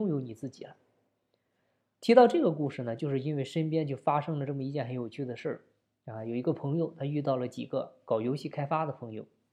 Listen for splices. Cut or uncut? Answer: uncut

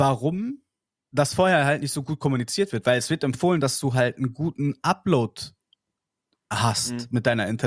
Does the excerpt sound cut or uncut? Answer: uncut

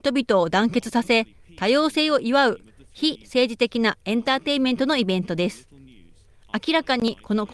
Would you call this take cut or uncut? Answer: uncut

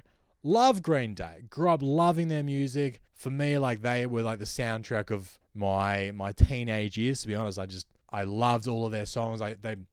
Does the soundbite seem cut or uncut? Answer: cut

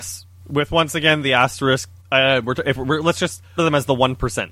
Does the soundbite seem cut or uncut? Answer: cut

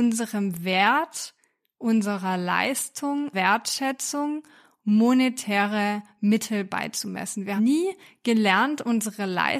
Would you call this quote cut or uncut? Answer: cut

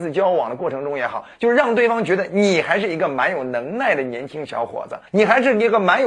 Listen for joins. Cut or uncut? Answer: cut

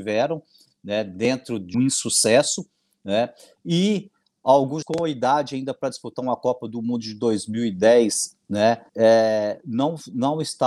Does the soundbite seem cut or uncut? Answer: cut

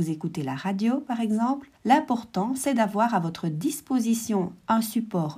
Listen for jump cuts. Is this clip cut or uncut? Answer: cut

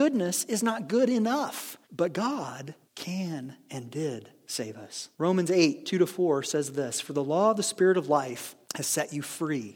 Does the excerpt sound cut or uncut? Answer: cut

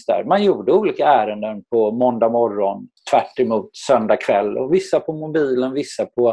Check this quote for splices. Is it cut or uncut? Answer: cut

